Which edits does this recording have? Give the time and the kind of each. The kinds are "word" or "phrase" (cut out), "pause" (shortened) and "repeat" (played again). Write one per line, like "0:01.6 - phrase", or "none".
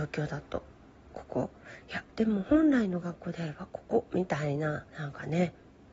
0:04.9 - pause